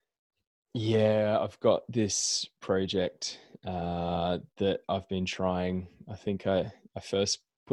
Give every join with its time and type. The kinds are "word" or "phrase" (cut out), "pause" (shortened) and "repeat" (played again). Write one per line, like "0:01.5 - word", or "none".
none

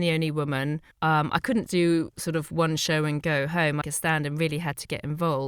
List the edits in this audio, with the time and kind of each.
0:00.9 - pause
0:01.7 - word
0:03.8 - phrase

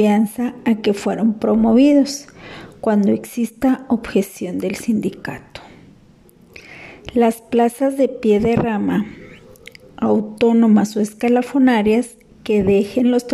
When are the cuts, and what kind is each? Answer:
none

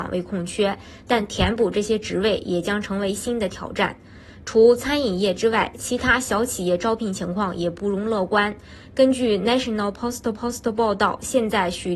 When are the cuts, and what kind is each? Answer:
0:10.3 - repeat

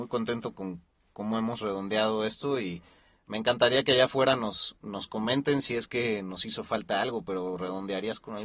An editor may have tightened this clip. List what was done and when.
none

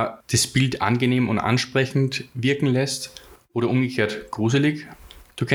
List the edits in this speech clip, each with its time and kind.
none

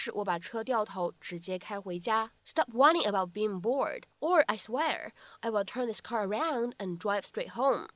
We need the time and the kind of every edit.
0:02.4 - pause
0:04.1 - pause

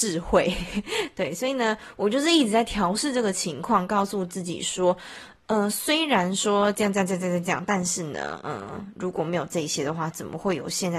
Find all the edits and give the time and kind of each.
none

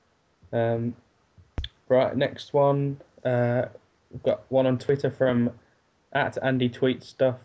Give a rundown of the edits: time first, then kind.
none

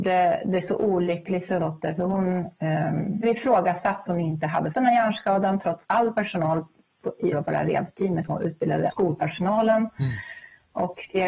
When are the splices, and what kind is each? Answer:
0:01.6 - word
0:03.2 - word
0:04.1 - word
0:04.7 - word
0:05.8 - word
0:07.3 - word
0:08.3 - word
0:08.9 - word

